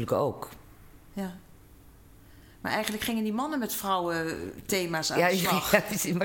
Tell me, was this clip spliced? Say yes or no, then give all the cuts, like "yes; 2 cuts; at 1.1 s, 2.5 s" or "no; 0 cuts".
no; 0 cuts